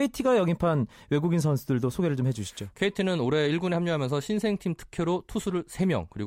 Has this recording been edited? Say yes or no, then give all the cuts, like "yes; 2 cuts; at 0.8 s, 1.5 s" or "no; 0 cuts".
no; 0 cuts